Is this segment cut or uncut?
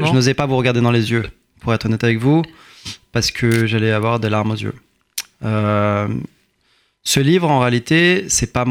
uncut